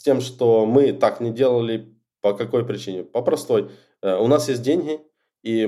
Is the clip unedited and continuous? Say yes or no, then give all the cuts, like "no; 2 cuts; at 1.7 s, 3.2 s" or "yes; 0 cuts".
yes; 0 cuts